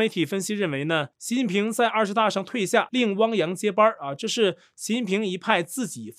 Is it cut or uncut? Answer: cut